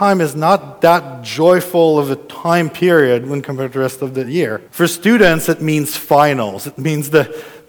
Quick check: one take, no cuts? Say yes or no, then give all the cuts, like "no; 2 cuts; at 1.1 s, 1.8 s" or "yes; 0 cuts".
no; 1 cut; at 4.7 s